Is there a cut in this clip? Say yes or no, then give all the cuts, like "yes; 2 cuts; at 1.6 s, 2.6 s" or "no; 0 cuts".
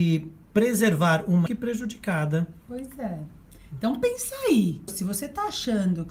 yes; 1 cut; at 1.5 s